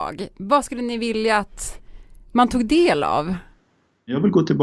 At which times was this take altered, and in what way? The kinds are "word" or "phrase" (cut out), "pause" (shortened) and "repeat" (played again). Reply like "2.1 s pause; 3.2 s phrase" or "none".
none